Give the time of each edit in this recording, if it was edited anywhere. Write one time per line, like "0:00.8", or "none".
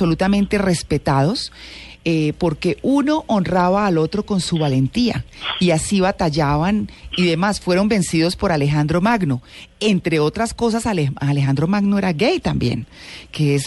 none